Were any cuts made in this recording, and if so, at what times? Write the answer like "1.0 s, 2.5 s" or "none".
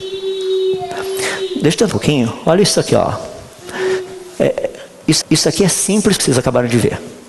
1.9 s, 5.2 s, 6.2 s